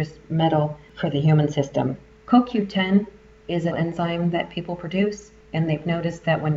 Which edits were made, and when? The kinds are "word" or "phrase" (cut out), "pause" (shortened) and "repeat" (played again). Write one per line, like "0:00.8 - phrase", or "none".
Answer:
0:02.1 - pause
0:03.7 - word
0:05.4 - pause